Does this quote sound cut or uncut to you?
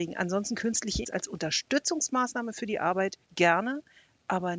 cut